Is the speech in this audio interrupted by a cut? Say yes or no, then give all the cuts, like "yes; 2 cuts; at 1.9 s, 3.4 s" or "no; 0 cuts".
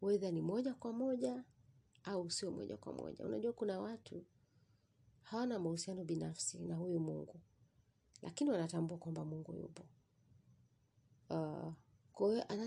no; 0 cuts